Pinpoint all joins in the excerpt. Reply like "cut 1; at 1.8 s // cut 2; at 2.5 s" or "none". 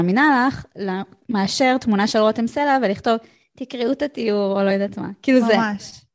none